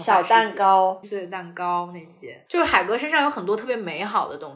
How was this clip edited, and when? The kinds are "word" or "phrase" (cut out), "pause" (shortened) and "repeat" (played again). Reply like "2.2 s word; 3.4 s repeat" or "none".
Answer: 1.0 s phrase; 2.5 s word